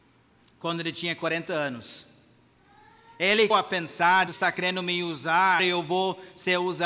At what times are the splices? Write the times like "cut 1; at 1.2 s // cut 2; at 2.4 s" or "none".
cut 1; at 3.5 s // cut 2; at 4.3 s // cut 3; at 5.6 s